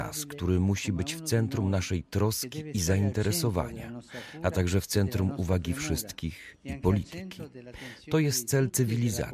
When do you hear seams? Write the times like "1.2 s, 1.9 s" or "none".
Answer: none